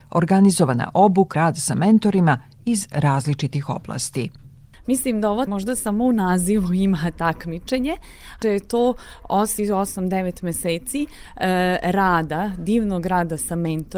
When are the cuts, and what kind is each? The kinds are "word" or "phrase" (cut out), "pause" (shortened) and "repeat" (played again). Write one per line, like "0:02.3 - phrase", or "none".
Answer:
0:01.3 - word
0:05.5 - word
0:08.4 - word
0:09.6 - word

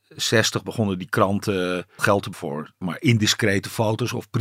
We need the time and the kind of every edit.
0:02.0 - word
0:02.3 - word
0:02.8 - word

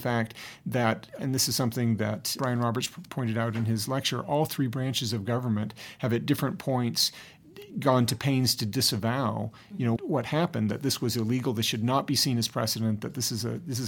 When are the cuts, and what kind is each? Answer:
0:01.2 - word
0:10.0 - word

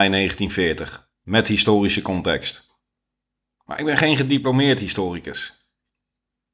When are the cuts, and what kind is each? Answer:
0:01.1 - pause
0:02.9 - pause

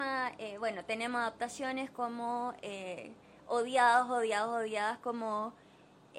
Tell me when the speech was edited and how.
none

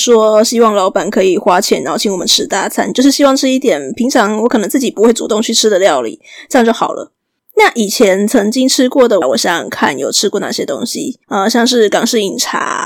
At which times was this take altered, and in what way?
0:07.4 - pause
0:09.2 - phrase
0:11.2 - pause

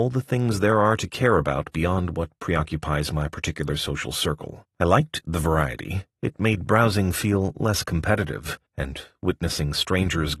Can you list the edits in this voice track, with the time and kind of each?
0:04.7 - pause
0:06.1 - pause
0:08.7 - pause

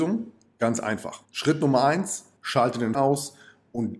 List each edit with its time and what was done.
0:01.3 - pause
0:02.4 - pause
0:02.9 - word

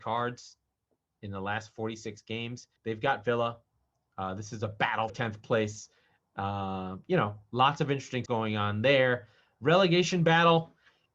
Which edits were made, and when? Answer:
0:02.8 - pause
0:05.1 - word
0:08.3 - word

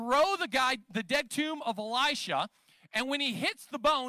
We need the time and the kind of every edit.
0:01.3 - phrase

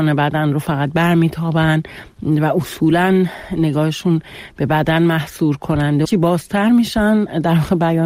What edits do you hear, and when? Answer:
0:06.0 - phrase

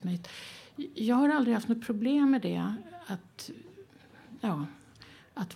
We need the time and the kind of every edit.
none

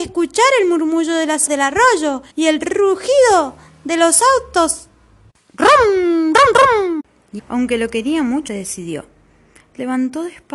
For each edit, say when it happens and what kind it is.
0:01.5 - word
0:02.3 - pause
0:05.3 - pause
0:07.4 - word
0:08.5 - phrase

